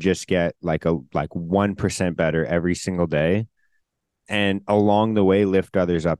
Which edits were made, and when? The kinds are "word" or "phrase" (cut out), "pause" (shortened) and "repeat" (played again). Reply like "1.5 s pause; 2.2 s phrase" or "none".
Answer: none